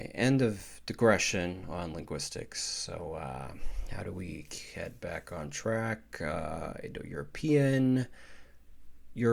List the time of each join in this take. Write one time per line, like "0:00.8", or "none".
none